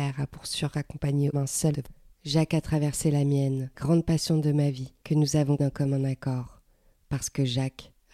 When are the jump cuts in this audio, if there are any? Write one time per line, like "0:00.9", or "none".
0:01.3
0:01.7
0:03.7
0:05.0
0:05.6